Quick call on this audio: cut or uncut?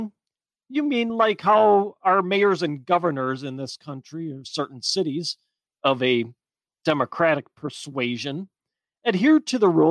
uncut